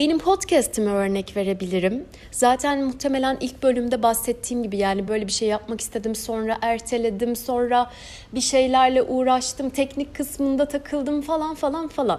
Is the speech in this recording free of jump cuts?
no; 1 cut; at 5.1 s

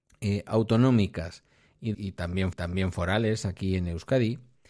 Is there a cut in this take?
yes; 2 cuts; at 1.9 s, 2.5 s

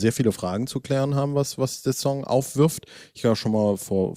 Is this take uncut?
yes; 0 cuts

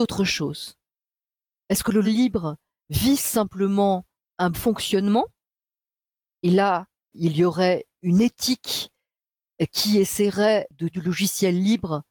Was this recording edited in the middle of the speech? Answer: yes; 4 cuts; at 2.0 s, 4.5 s, 7.1 s, 10.9 s

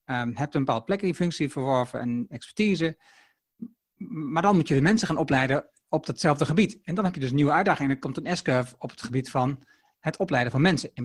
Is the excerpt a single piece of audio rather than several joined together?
yes; 0 cuts

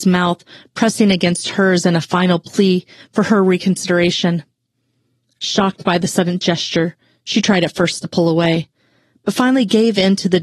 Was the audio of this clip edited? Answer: no; 0 cuts

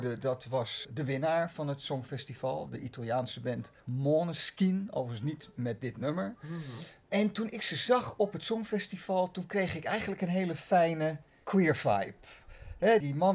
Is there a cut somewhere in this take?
yes; 1 cut; at 3.8 s

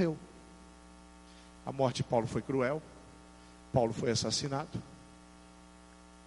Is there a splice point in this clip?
no; 0 cuts

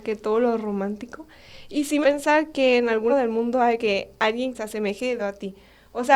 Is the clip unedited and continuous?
no; 5 cuts; at 2.0 s, 3.1 s, 3.8 s, 4.5 s, 5.2 s

